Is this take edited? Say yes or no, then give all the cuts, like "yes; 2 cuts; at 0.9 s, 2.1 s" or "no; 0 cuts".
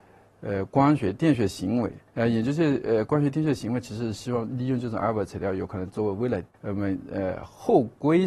yes; 2 cuts; at 2.1 s, 6.5 s